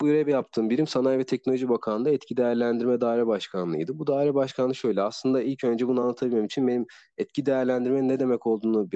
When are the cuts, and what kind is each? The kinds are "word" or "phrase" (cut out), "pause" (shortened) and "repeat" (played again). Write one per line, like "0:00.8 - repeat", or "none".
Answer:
none